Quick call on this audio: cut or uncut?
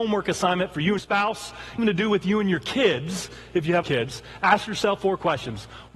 cut